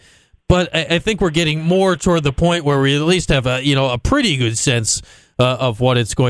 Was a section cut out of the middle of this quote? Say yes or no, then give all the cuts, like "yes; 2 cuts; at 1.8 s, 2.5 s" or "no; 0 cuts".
no; 0 cuts